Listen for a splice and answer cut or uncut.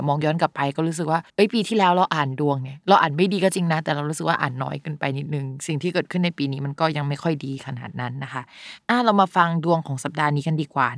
cut